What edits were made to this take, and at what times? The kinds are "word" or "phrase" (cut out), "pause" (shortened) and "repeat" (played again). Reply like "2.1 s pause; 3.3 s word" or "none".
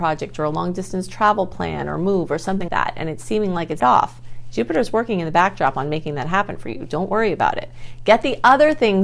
2.7 s word; 3.8 s word